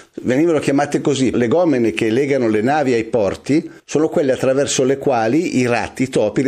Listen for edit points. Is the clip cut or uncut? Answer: cut